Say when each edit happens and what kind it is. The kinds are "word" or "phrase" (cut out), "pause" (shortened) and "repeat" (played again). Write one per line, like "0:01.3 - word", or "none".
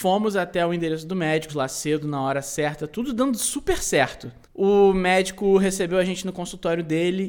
0:01.5 - word
0:04.4 - pause